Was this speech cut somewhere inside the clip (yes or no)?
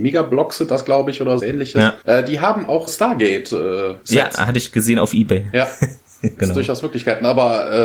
yes